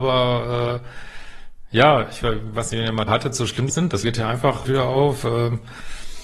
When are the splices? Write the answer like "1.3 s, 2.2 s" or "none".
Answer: 3.1 s, 3.7 s, 4.0 s, 4.7 s